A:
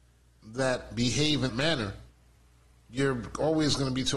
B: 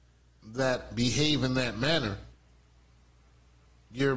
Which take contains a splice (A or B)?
A